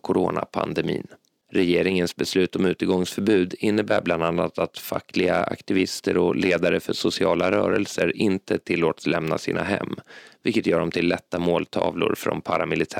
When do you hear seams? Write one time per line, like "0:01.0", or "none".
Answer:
none

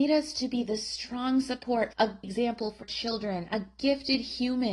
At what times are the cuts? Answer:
0:01.9
0:02.2
0:02.8

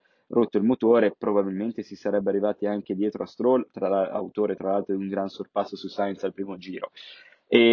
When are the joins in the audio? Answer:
none

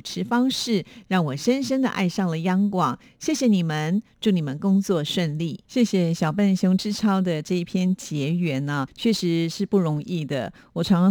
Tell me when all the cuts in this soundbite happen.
0:05.6
0:08.9

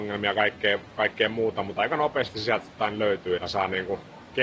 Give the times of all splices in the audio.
0:03.4

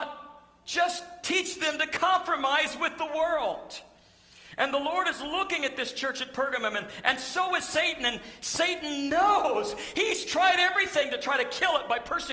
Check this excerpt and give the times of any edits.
none

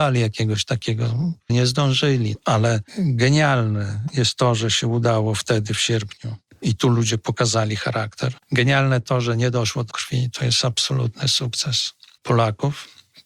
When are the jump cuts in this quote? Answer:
0:01.5
0:08.4
0:09.9

